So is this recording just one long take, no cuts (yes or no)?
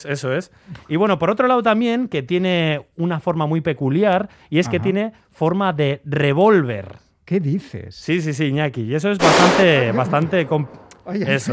yes